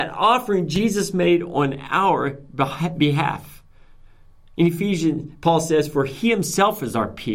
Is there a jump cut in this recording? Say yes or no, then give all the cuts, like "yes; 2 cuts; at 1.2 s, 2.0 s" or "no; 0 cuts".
no; 0 cuts